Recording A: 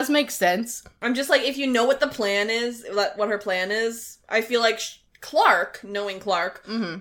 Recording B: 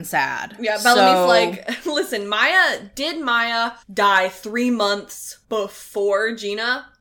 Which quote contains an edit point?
B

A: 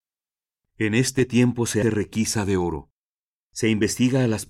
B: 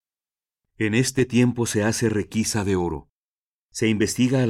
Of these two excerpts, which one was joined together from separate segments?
A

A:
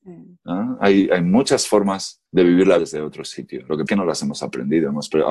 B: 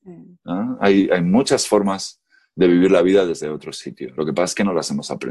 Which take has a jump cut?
A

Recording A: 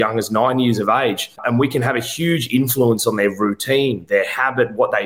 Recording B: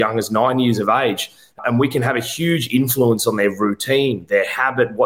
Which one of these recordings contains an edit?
A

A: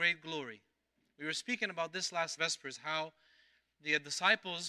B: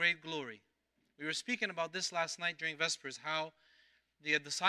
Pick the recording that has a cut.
A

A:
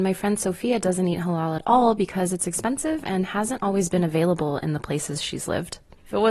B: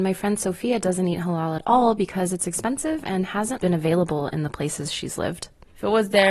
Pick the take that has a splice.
B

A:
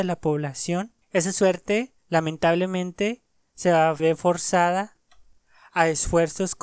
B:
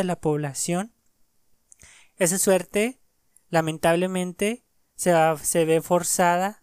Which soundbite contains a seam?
A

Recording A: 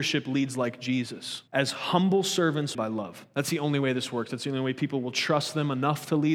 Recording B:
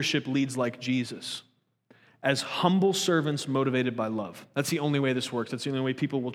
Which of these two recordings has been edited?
A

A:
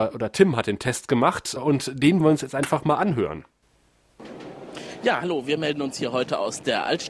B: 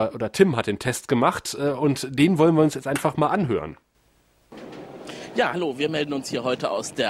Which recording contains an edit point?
A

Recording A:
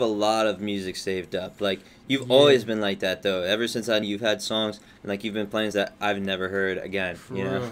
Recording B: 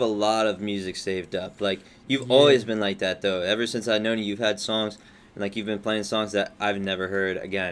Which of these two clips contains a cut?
A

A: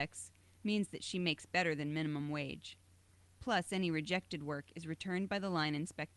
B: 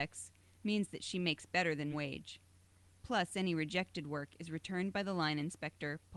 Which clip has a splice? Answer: B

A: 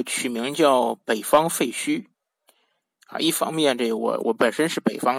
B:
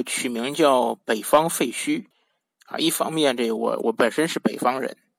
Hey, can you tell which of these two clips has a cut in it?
B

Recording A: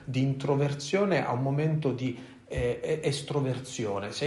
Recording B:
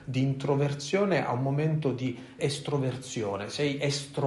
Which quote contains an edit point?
B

